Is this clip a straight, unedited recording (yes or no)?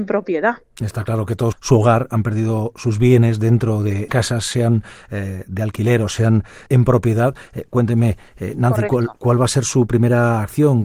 no